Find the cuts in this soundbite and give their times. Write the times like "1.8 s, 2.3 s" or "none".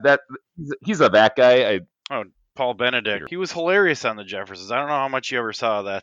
none